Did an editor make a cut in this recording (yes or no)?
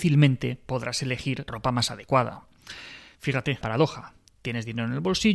yes